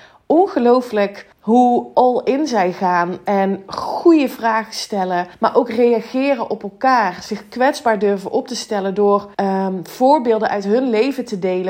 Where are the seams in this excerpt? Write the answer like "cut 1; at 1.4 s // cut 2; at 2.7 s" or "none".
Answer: cut 1; at 1.3 s // cut 2; at 5.3 s // cut 3; at 9.3 s